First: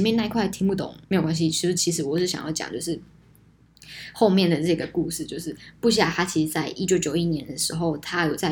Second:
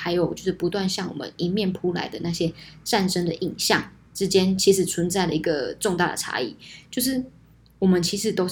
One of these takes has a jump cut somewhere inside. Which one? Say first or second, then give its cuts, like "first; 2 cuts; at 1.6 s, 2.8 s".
first; 1 cut; at 1.0 s